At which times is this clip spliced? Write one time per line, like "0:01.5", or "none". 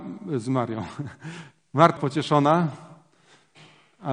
0:02.0